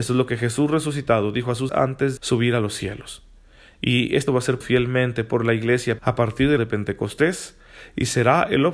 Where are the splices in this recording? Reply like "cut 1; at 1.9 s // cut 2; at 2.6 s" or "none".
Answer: cut 1; at 1.7 s // cut 2; at 2.2 s // cut 3; at 4.3 s // cut 4; at 4.6 s // cut 5; at 6.0 s // cut 6; at 6.6 s